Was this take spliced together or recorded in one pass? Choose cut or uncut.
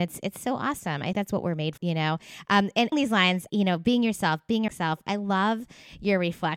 cut